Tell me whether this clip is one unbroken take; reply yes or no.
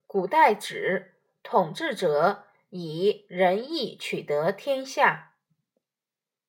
yes